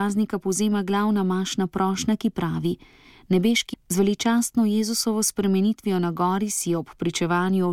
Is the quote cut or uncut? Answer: cut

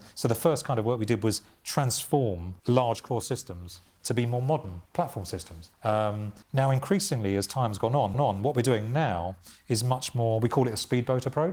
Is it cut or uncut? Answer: cut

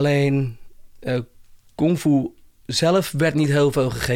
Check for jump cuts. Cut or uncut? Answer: uncut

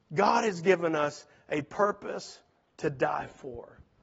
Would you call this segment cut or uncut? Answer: uncut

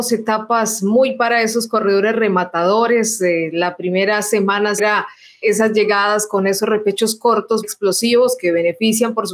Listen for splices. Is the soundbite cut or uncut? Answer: cut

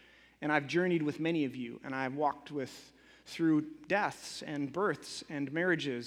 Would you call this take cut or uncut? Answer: uncut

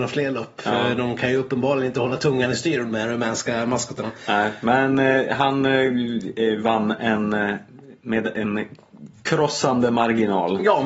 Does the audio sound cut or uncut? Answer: uncut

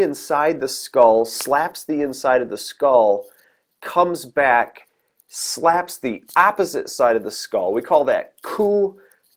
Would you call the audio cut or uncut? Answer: uncut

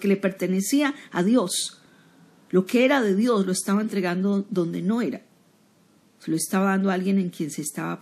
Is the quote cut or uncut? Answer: uncut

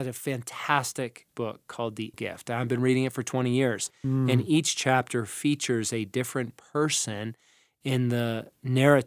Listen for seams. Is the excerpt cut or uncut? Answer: cut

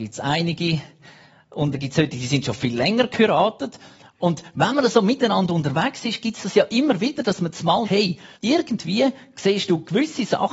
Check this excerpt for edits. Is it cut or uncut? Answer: cut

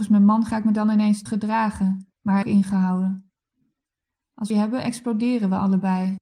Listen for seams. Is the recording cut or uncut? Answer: cut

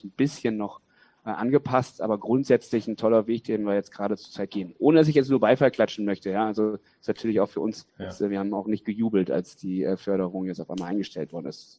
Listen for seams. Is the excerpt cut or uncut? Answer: cut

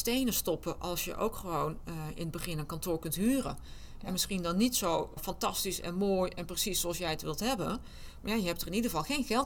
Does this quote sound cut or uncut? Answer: uncut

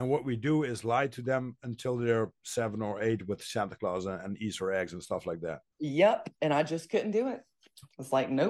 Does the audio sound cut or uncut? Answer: cut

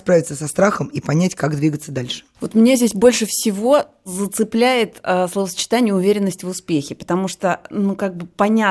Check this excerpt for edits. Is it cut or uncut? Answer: uncut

